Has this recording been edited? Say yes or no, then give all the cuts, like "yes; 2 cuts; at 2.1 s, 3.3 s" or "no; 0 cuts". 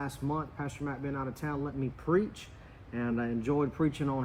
no; 0 cuts